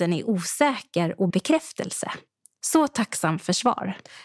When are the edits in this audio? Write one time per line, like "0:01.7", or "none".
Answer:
0:01.3